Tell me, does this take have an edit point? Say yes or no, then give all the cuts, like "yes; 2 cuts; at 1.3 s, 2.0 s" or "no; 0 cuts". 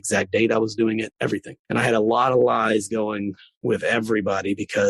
no; 0 cuts